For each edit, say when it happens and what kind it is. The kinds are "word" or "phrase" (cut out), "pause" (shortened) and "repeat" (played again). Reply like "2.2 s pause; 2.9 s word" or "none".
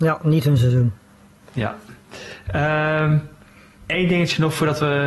none